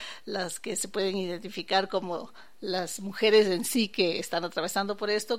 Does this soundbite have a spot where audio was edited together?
no; 0 cuts

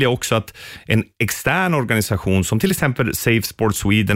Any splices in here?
no; 0 cuts

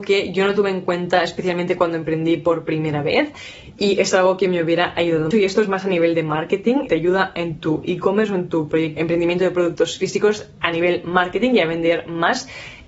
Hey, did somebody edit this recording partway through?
yes; 3 cuts; at 5.3 s, 6.9 s, 9.0 s

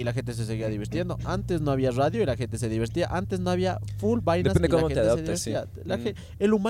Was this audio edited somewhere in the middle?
no; 0 cuts

